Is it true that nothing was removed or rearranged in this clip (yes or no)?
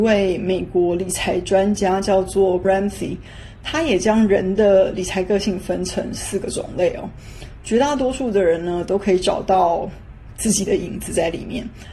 no